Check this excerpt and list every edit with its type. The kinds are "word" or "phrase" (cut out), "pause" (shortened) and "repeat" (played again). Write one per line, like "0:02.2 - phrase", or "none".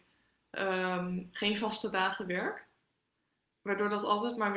none